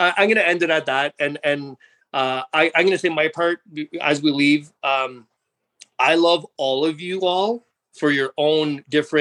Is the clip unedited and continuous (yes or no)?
yes